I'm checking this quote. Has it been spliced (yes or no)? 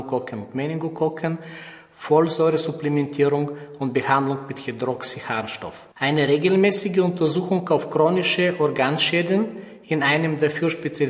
yes